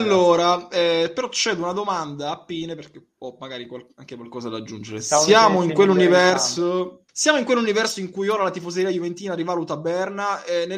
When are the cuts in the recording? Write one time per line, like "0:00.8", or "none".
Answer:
0:07.1